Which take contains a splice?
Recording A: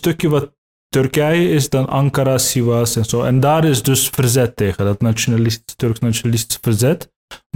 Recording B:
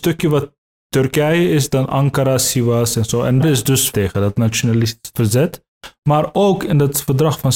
B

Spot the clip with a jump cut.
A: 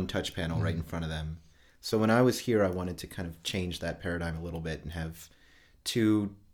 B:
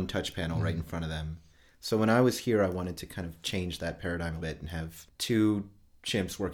B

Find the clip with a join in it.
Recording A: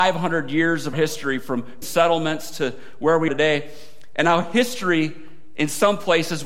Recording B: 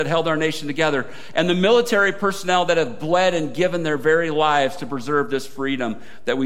A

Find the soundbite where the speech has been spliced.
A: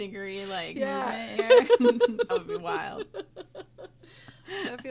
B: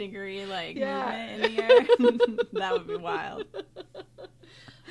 A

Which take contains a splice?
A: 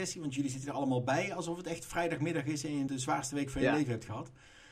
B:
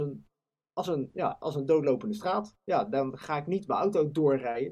A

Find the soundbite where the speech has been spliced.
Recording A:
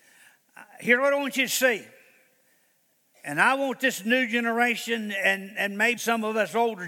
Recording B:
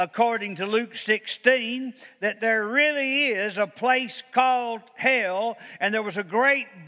A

